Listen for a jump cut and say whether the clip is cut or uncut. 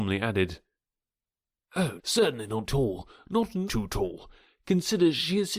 cut